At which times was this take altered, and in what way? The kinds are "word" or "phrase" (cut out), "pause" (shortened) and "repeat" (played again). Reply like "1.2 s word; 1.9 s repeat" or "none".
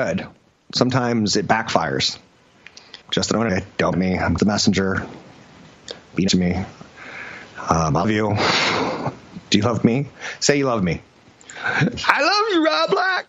3.0 s pause; 3.5 s phrase; 3.9 s phrase; 4.4 s word; 6.3 s word; 8.0 s word